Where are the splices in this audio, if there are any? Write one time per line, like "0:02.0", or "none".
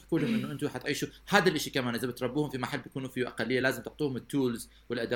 none